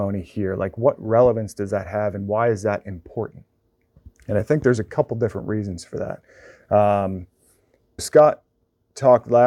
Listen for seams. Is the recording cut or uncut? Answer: cut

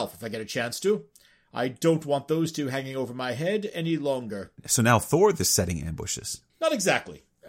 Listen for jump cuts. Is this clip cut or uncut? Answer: uncut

